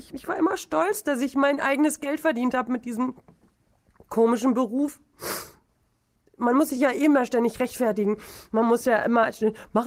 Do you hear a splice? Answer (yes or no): no